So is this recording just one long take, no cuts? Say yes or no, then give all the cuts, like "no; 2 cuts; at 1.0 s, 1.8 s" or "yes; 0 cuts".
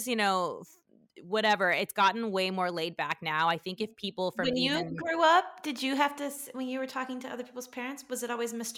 yes; 0 cuts